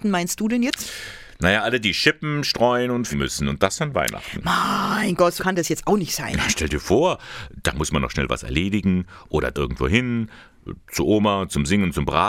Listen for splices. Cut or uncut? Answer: cut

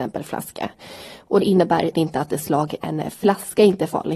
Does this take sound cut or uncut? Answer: cut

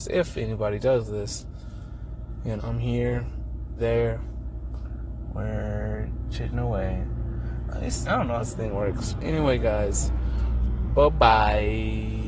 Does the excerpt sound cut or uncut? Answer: cut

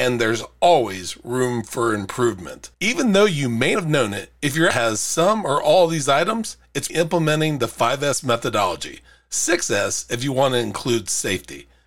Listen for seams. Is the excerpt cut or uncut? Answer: cut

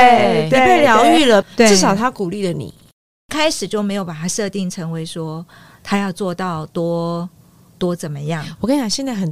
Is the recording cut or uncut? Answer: uncut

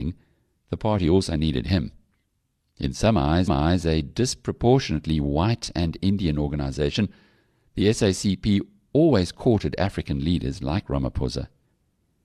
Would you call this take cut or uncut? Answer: cut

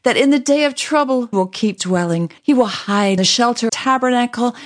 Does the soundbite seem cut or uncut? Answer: cut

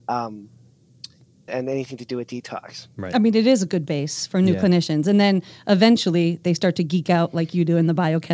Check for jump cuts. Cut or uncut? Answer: cut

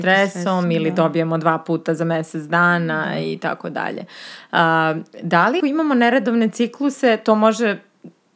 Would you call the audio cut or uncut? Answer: cut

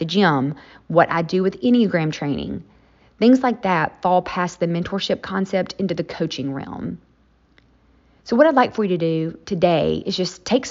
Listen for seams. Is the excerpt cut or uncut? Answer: uncut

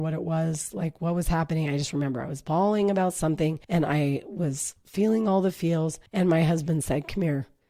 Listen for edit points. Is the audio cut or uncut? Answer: cut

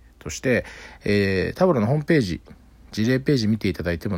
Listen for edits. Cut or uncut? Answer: uncut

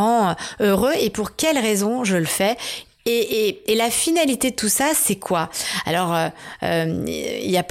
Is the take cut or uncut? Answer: uncut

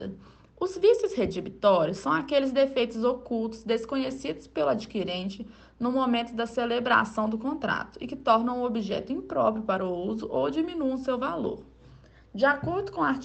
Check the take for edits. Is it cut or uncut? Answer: uncut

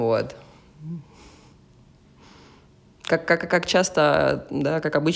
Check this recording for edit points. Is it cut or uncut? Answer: uncut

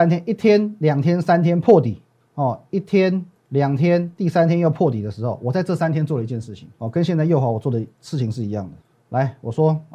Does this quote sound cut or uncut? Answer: cut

